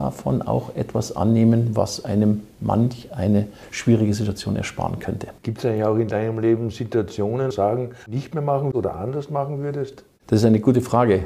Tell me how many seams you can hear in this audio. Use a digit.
3